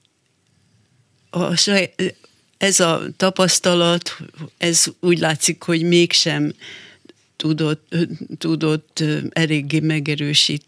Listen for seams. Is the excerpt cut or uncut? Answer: cut